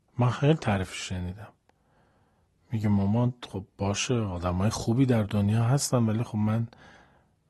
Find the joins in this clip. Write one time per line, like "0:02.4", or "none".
none